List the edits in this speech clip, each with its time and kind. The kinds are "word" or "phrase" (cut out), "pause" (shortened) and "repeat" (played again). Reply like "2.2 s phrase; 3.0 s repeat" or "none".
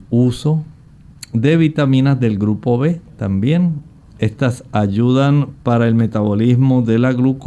none